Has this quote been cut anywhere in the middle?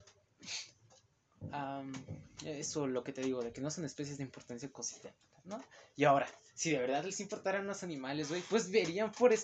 no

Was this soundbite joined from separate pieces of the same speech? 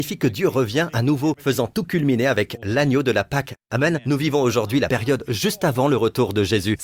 no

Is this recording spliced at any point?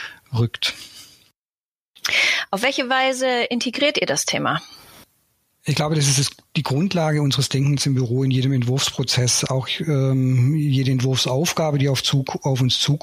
no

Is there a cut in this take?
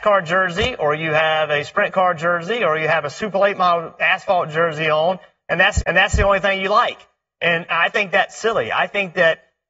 yes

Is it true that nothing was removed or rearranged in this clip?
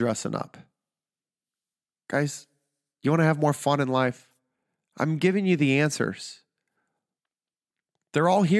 yes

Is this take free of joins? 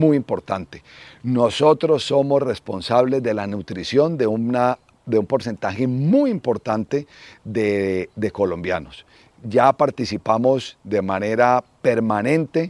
yes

